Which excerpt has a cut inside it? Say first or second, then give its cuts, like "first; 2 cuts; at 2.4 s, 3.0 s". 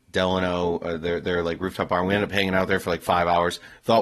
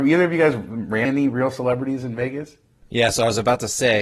second; 1 cut; at 1.0 s